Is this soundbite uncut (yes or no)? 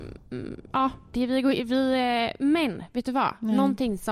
yes